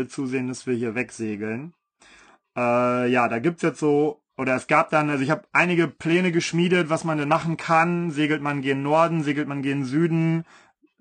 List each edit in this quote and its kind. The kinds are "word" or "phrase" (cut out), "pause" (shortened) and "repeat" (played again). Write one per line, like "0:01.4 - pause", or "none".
none